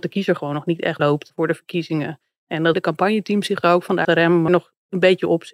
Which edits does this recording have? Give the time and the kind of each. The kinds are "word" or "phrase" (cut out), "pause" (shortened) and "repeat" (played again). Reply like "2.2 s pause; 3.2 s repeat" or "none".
1.0 s word; 2.7 s word; 4.0 s word; 4.5 s word